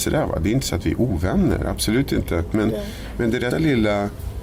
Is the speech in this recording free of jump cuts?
no; 1 cut; at 3.5 s

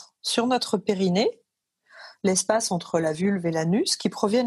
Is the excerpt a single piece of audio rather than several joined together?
yes; 0 cuts

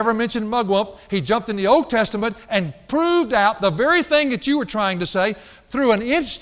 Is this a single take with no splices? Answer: yes; 0 cuts

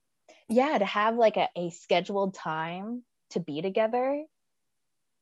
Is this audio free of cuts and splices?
yes; 0 cuts

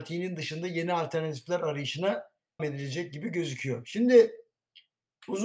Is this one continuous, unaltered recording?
no; 1 cut; at 2.6 s

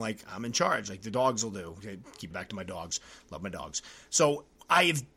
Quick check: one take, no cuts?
no; 1 cut; at 2.3 s

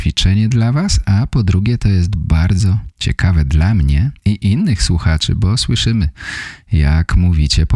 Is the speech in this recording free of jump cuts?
no; 2 cuts; at 2.9 s, 4.2 s

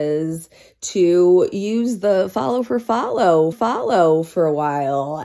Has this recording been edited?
yes; 1 cut; at 3.5 s

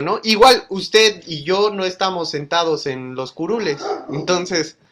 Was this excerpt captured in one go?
yes; 0 cuts

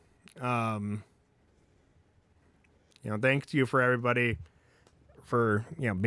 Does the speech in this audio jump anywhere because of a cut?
no; 0 cuts

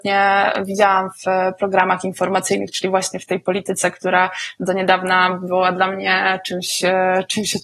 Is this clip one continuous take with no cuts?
yes; 0 cuts

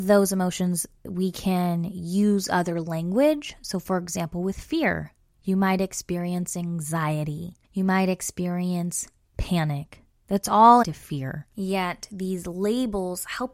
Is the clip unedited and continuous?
no; 3 cuts; at 7.6 s, 10.8 s, 11.5 s

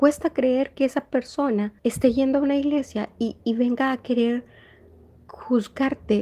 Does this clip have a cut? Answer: yes; 2 cuts; at 1.8 s, 3.4 s

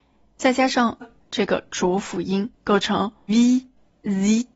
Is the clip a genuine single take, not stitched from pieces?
no; 3 cuts; at 1.0 s, 2.5 s, 3.3 s

